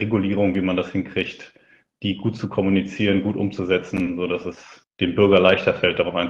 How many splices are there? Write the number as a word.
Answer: zero